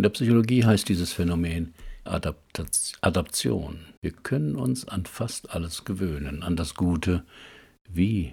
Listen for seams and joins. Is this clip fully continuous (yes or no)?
no